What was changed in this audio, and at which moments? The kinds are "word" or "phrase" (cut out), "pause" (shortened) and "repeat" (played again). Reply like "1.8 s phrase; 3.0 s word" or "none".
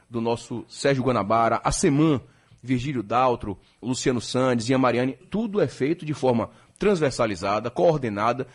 3.8 s word; 5.2 s word